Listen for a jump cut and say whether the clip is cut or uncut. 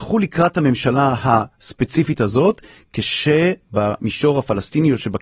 uncut